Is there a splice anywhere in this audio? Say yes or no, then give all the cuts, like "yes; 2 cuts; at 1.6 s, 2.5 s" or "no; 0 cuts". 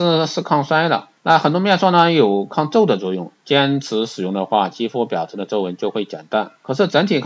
yes; 1 cut; at 1.2 s